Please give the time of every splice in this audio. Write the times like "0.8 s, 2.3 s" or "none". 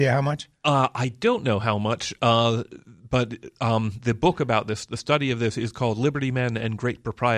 none

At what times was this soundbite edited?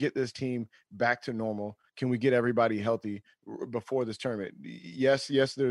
none

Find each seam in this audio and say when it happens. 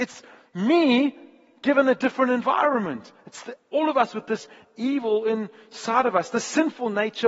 none

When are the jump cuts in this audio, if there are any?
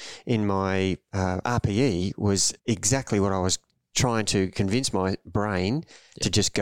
2.6 s

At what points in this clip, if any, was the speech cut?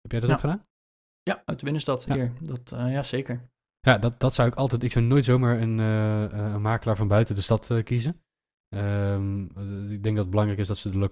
none

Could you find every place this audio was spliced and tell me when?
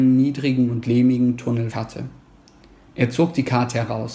1.7 s

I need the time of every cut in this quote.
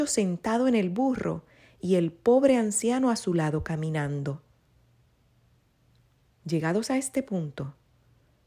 none

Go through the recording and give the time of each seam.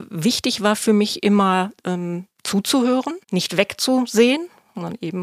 1.8 s, 3.2 s

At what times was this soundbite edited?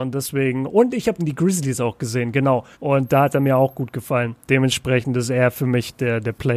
1.2 s, 2.7 s, 4.4 s

